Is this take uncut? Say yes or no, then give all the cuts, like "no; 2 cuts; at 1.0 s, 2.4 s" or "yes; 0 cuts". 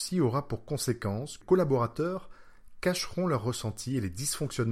no; 1 cut; at 1.4 s